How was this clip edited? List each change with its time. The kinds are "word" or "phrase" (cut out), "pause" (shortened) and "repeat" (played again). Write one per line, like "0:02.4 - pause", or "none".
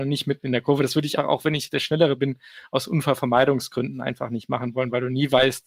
0:01.2 - word